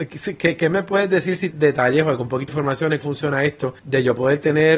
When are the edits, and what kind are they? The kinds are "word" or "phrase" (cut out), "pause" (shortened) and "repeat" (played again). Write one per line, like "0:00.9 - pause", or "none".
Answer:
0:01.5 - word
0:02.5 - word
0:03.0 - word
0:03.8 - pause

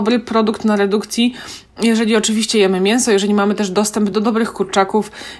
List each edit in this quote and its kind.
none

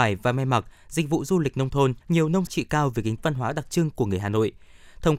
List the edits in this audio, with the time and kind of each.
0:02.0 - pause
0:02.5 - phrase
0:03.2 - phrase

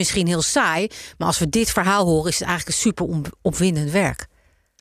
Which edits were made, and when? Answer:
none

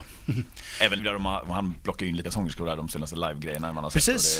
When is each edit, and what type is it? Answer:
0:01.0 - word
0:02.2 - word

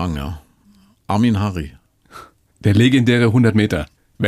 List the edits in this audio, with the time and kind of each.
none

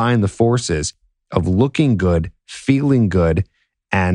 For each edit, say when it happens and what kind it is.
none

